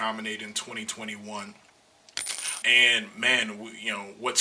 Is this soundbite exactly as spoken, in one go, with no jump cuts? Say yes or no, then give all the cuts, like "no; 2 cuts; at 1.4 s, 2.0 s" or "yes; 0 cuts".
no; 1 cut; at 2.6 s